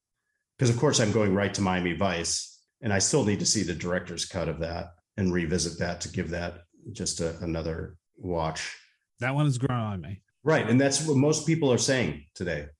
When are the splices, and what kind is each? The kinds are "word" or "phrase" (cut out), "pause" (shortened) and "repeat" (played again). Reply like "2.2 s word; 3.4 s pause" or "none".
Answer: 8.1 s pause

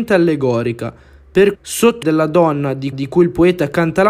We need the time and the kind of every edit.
1.5 s word; 2.0 s word; 2.9 s repeat

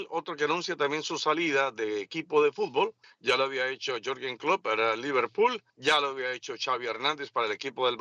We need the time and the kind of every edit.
3.0 s pause; 5.7 s pause

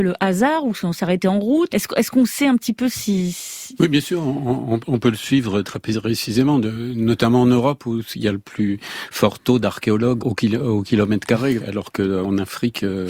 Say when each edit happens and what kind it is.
1.7 s word; 5.6 s word; 10.2 s word; 11.6 s word

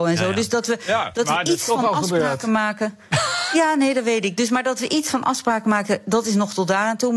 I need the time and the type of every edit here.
none

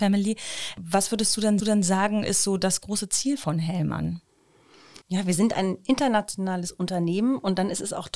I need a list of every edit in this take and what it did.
1.6 s repeat; 5.0 s pause

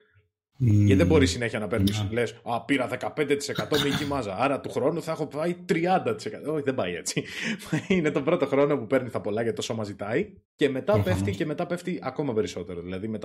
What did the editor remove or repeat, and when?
10.4 s pause

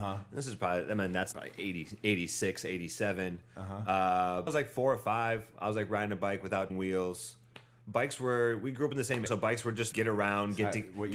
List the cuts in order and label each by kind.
1.3 s word; 4.5 s word; 6.7 s word; 9.3 s word; 9.9 s word

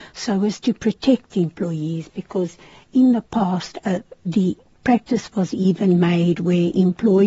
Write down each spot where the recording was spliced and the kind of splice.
none

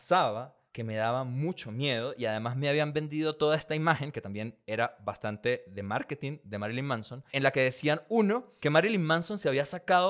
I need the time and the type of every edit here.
7.3 s pause

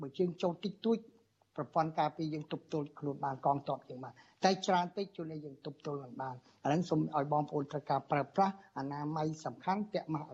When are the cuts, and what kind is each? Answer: none

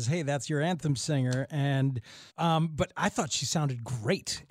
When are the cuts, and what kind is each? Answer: 2.3 s pause

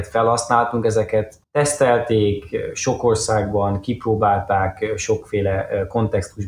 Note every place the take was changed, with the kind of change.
1.4 s pause

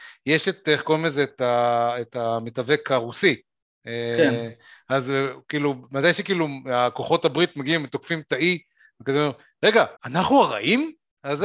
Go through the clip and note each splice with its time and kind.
10.0 s pause

